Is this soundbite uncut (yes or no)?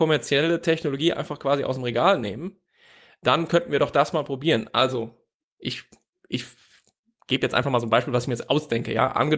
yes